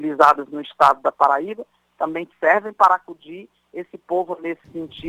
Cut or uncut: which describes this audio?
uncut